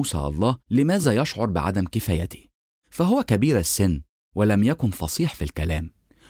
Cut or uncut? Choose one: uncut